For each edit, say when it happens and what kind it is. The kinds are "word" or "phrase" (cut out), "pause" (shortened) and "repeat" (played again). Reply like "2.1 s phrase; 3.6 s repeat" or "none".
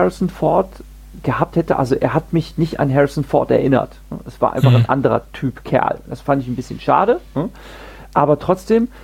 none